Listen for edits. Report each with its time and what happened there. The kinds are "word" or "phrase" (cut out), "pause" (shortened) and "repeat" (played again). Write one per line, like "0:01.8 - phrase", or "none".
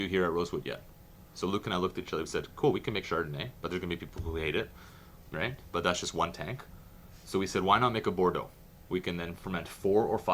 0:03.0 - word
0:05.3 - phrase